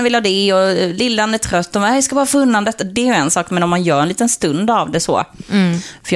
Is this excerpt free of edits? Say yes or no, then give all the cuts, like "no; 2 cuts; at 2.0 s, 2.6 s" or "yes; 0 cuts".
yes; 0 cuts